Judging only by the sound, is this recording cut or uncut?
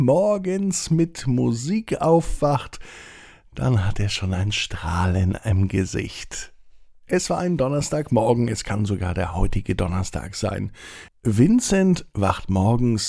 uncut